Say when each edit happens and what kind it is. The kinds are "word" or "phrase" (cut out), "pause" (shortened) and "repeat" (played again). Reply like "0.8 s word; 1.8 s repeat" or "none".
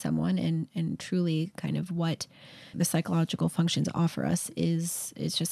2.7 s word